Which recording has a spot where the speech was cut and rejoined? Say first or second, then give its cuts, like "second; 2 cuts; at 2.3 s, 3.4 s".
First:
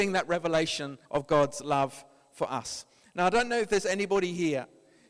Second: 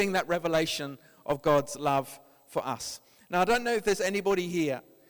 first; 1 cut; at 1.0 s